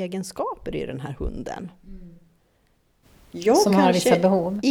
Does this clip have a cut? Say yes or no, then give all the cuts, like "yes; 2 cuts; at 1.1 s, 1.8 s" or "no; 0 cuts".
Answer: no; 0 cuts